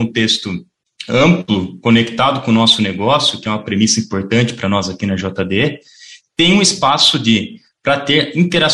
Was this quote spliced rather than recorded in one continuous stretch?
no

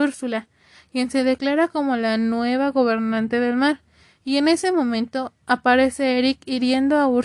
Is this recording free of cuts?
yes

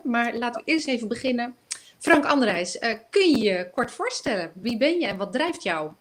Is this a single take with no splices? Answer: yes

